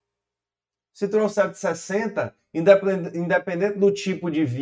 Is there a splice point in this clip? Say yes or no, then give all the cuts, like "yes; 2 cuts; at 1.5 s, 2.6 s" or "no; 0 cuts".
no; 0 cuts